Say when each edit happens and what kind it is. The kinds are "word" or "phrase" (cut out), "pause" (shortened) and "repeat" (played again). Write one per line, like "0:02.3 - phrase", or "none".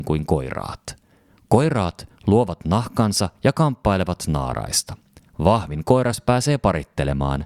none